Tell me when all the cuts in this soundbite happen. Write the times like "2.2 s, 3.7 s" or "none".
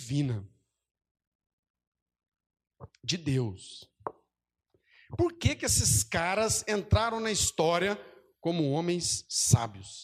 none